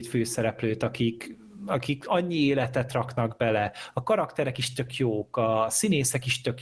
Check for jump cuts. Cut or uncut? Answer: uncut